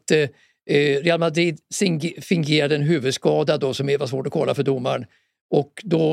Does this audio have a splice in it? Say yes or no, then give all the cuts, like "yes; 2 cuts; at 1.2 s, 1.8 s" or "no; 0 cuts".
no; 0 cuts